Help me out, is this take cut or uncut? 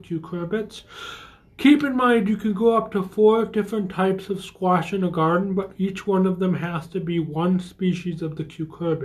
uncut